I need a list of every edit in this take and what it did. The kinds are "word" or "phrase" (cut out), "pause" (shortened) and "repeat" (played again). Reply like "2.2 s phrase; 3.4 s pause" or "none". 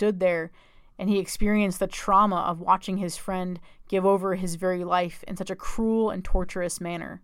none